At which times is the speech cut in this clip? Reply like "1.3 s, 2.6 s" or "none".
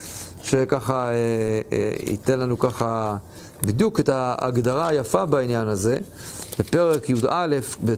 none